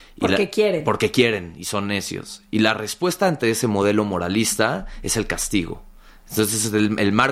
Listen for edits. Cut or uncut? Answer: uncut